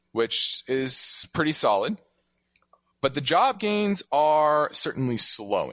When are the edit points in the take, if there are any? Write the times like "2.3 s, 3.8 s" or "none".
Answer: none